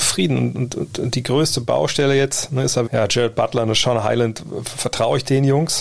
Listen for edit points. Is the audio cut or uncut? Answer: cut